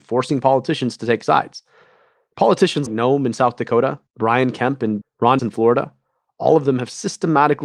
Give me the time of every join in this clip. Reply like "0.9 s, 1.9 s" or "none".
2.9 s, 4.1 s, 5.0 s, 5.4 s